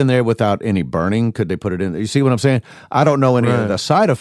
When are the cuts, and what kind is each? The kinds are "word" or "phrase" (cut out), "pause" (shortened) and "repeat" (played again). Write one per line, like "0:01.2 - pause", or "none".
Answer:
none